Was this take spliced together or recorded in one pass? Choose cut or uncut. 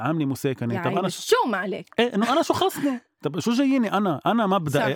uncut